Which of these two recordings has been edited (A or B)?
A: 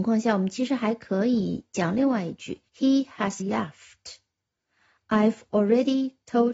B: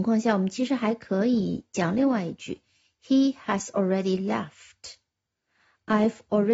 A